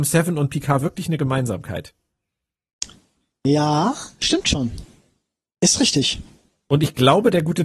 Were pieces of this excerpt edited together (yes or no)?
no